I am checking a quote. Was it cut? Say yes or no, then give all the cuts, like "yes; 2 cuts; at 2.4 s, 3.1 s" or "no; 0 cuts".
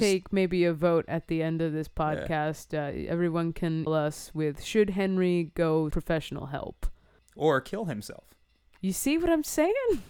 yes; 3 cuts; at 3.9 s, 5.9 s, 7.2 s